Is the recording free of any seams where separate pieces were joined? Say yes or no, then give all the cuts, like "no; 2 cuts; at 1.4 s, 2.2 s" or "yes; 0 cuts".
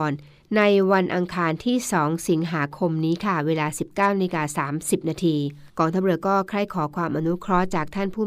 no; 1 cut; at 5.7 s